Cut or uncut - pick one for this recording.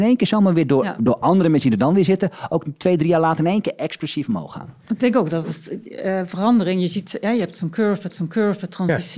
cut